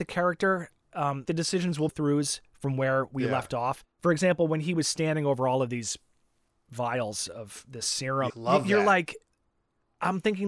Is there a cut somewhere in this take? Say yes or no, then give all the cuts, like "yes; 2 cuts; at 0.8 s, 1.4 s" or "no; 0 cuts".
yes; 4 cuts; at 1.2 s, 1.9 s, 3.9 s, 8.3 s